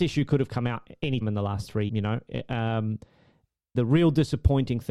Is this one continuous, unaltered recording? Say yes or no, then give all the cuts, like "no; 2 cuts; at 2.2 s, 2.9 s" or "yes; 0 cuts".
no; 3 cuts; at 1.2 s, 1.9 s, 3.8 s